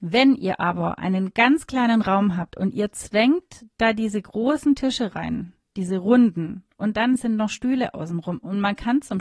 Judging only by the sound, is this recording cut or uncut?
uncut